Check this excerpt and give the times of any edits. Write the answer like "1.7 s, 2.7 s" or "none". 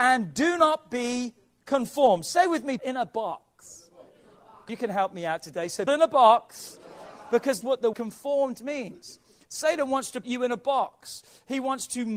2.8 s, 4.7 s, 5.9 s, 7.6 s, 7.9 s, 10.2 s